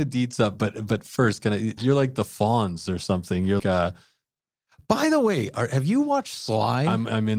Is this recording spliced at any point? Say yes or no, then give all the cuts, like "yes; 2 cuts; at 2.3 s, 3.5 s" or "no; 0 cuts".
yes; 2 cuts; at 1.8 s, 3.6 s